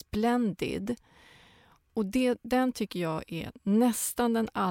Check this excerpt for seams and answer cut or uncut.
uncut